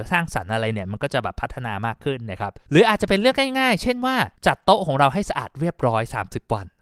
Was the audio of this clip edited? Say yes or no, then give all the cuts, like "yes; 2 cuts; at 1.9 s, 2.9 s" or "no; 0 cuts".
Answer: yes; 2 cuts; at 2.7 s, 4.4 s